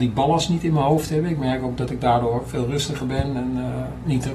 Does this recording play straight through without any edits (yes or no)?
yes